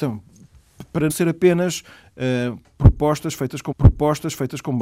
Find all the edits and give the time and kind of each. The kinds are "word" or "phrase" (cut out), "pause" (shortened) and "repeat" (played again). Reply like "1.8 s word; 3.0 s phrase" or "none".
1.1 s word; 3.7 s repeat